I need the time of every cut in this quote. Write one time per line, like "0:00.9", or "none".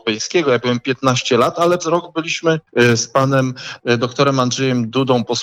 0:01.8
0:02.7